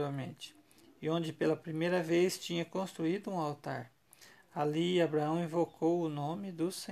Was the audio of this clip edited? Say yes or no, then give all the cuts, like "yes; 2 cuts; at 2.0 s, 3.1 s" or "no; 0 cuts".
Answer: no; 0 cuts